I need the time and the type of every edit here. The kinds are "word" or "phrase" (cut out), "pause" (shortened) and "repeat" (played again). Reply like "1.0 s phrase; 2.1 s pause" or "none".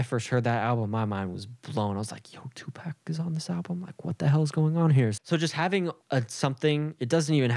6.0 s pause

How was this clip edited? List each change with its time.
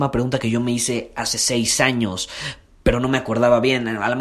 none

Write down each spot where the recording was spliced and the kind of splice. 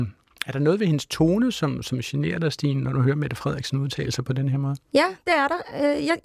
none

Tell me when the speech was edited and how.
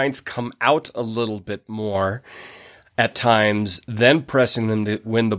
none

